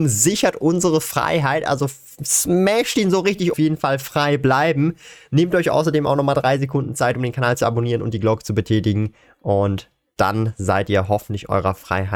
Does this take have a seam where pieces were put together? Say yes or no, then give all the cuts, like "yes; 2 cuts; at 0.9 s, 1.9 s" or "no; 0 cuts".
yes; 1 cut; at 3.5 s